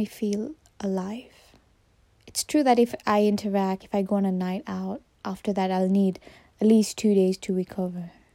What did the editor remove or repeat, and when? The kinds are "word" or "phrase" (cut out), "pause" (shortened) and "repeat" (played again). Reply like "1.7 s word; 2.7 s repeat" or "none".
3.8 s word